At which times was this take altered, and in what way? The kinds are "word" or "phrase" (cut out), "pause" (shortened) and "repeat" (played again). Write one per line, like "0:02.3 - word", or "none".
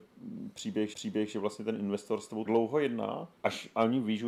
0:00.9 - repeat
0:02.5 - word
0:03.4 - pause